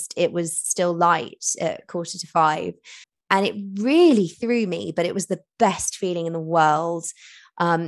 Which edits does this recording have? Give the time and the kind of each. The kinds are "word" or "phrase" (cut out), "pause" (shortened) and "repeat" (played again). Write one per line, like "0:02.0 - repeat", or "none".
0:03.0 - pause